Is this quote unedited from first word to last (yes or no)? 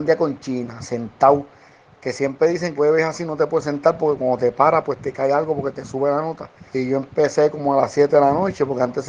no